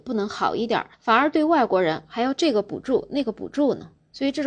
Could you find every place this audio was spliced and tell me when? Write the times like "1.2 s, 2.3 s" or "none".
0.9 s

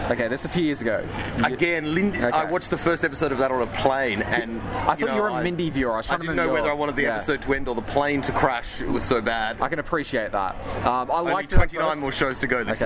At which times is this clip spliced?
none

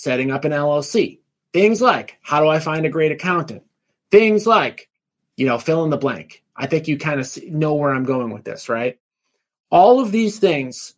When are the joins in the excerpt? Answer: none

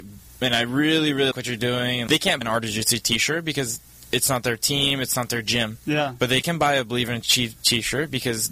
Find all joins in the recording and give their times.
1.3 s, 2.1 s, 2.4 s

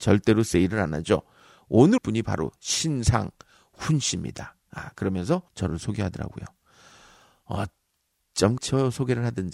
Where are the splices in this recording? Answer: 2.0 s, 5.5 s, 8.6 s

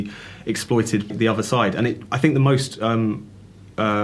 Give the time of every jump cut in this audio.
1.1 s, 2.0 s

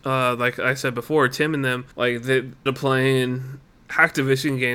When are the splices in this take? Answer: 1.9 s, 2.7 s

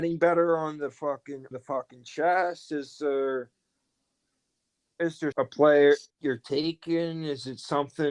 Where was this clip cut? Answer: 1.5 s, 5.3 s, 6.1 s

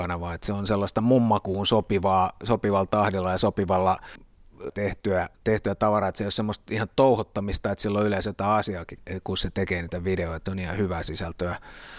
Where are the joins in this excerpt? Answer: 4.7 s, 5.3 s, 10.5 s

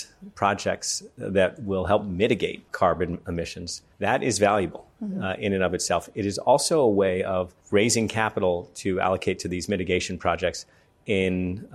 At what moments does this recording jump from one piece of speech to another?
2.7 s, 3.9 s, 7.6 s

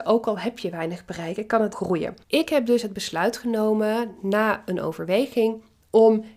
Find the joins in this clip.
1.7 s, 2.2 s

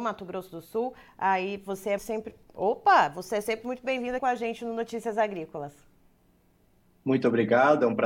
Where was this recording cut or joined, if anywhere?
2.0 s, 4.2 s

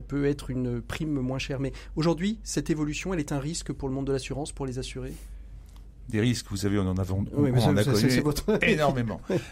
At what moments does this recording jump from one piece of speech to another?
none

